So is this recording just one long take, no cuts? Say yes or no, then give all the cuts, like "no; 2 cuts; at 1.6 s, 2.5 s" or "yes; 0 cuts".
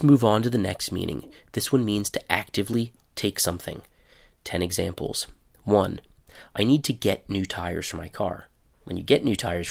yes; 0 cuts